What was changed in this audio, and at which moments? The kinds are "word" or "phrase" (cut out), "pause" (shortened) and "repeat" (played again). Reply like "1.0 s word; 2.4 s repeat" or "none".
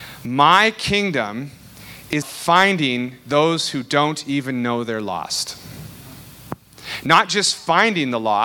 2.2 s word